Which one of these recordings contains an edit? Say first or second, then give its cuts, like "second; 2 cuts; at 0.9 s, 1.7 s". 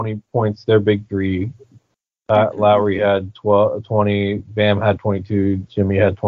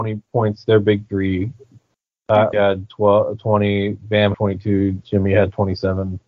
second; 2 cuts; at 2.5 s, 4.3 s